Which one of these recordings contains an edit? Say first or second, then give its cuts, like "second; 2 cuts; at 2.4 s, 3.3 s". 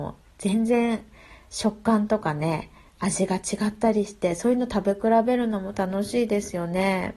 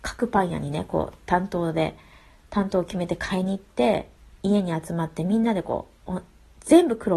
second; 1 cut; at 4.2 s